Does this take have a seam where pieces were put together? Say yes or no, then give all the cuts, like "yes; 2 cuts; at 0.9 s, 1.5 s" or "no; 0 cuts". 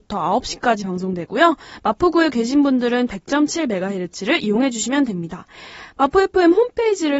yes; 1 cut; at 3.1 s